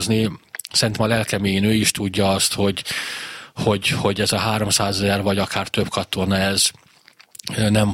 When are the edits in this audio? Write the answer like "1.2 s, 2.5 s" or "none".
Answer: none